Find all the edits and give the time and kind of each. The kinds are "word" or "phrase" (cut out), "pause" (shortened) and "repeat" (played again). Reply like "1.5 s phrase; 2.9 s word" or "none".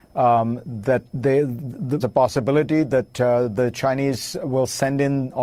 1.1 s pause; 2.0 s phrase